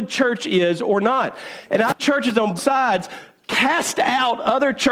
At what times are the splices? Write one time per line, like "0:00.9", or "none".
0:02.0
0:02.6